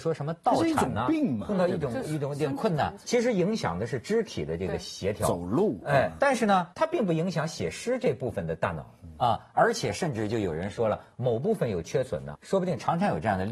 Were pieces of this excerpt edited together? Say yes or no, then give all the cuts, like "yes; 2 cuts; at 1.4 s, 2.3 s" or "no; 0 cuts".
yes; 4 cuts; at 3.0 s, 6.2 s, 6.7 s, 12.3 s